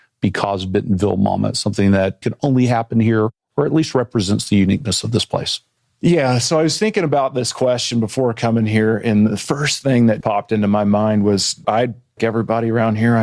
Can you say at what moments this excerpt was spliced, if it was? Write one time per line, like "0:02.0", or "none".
0:02.2
0:10.2
0:11.6
0:12.2